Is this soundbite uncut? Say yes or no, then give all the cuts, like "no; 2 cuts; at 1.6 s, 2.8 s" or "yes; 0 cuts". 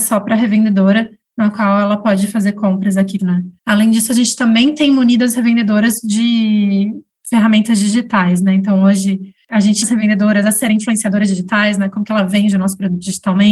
no; 3 cuts; at 3.2 s, 3.6 s, 9.8 s